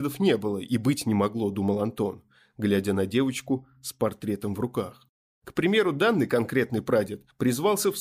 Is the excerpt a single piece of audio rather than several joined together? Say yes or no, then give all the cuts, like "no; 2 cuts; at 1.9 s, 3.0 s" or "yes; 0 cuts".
yes; 0 cuts